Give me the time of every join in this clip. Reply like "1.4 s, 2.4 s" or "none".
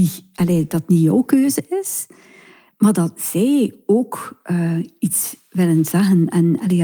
none